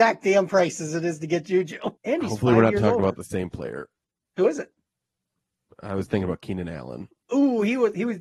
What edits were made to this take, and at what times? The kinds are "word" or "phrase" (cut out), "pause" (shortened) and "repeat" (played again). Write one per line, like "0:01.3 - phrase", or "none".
0:02.0 - pause